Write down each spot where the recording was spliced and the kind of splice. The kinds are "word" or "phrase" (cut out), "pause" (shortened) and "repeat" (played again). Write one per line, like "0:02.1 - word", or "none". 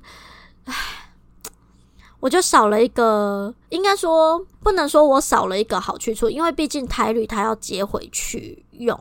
0:03.6 - pause
0:04.5 - pause